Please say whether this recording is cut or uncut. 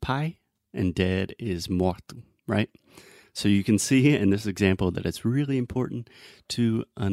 uncut